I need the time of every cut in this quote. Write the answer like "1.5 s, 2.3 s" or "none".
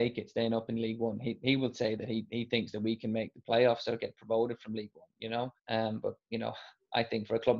5.6 s